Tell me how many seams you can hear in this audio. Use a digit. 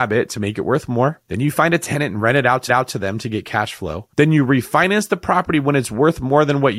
3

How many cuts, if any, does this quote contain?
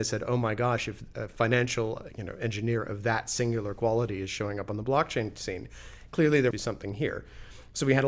1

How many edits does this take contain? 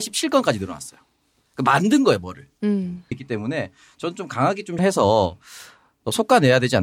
2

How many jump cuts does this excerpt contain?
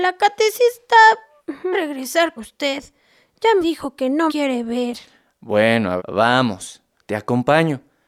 5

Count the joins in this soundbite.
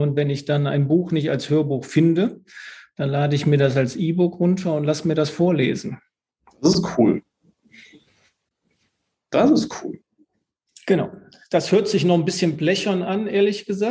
0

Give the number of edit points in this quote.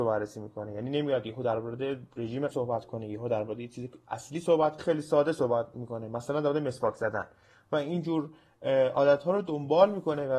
2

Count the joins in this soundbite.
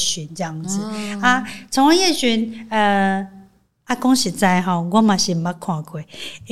0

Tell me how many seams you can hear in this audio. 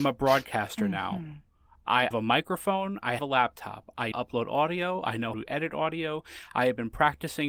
4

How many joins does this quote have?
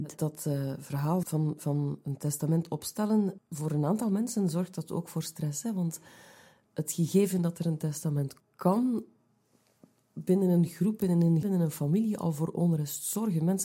4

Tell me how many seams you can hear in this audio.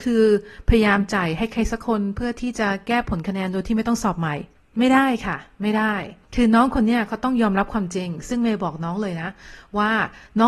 2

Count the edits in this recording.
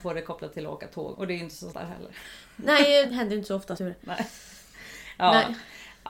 4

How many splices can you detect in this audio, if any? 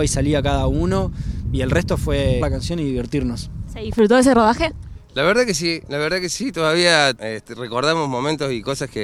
2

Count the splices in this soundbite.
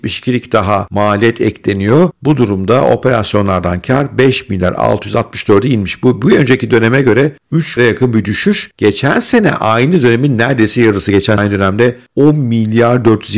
2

